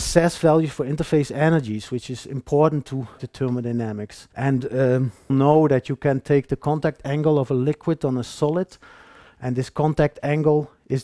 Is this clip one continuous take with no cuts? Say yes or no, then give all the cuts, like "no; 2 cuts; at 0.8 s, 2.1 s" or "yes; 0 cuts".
no; 3 cuts; at 3.2 s, 4.3 s, 5.3 s